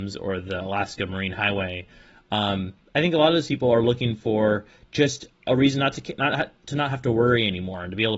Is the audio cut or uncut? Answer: uncut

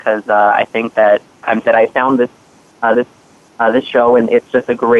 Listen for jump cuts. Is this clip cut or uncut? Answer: cut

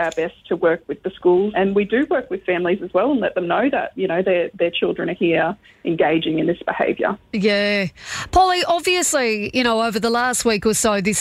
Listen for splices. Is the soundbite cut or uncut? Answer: cut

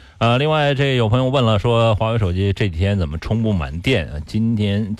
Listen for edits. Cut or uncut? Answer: uncut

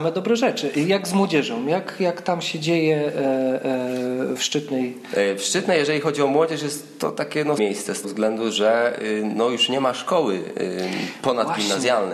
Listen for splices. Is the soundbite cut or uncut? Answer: cut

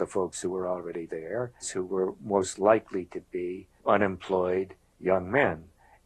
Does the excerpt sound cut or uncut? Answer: cut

